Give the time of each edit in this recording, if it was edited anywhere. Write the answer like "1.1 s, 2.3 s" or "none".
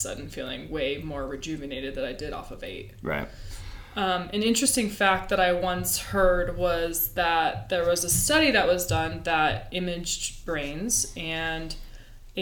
9.7 s